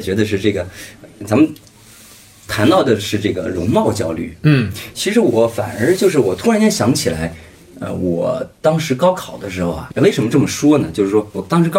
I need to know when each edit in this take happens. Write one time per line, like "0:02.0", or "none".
0:09.9